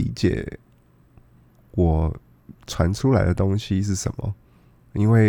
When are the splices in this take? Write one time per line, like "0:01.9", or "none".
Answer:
0:02.6

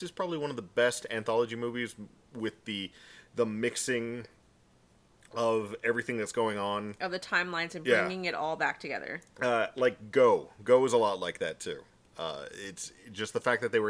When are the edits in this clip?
none

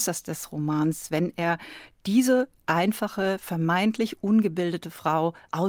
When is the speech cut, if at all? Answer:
none

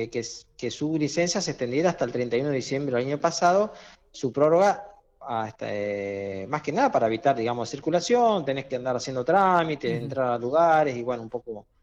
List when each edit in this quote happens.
none

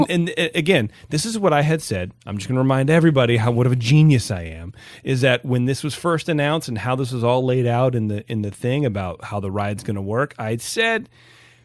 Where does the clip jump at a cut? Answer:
none

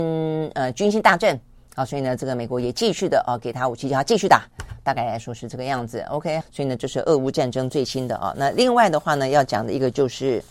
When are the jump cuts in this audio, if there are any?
0:06.4

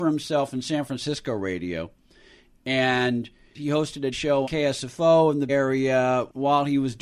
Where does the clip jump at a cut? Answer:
0:04.1
0:04.4
0:05.5

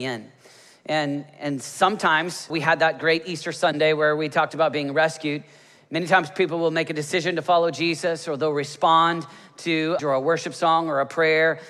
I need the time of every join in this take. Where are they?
0:02.5
0:10.0

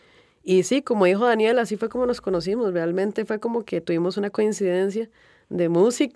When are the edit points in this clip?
none

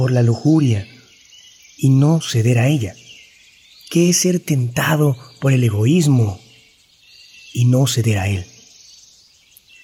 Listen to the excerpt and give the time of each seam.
none

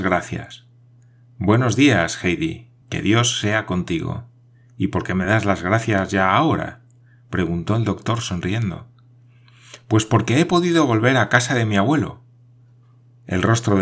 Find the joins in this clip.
none

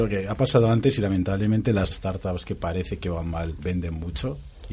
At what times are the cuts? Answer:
0:01.9
0:03.6

